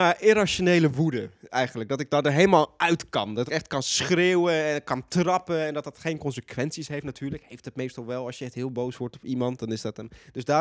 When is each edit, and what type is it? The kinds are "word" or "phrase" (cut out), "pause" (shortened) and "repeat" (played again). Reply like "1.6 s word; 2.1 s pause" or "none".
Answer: 3.5 s phrase